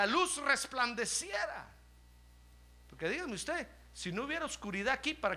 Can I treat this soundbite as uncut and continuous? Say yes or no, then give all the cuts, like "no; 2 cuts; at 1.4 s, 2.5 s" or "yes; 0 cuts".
yes; 0 cuts